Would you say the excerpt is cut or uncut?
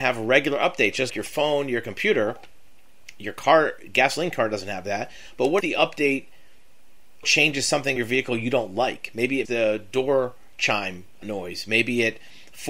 cut